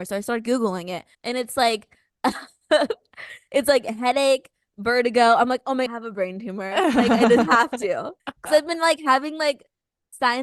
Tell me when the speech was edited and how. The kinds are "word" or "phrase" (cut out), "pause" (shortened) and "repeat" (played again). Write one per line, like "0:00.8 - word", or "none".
0:01.1 - pause
0:05.9 - phrase
0:08.2 - pause